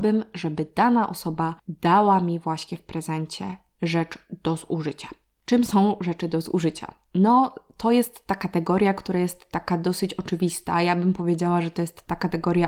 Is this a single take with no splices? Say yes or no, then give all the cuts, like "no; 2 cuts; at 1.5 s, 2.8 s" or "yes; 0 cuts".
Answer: no; 1 cut; at 1.6 s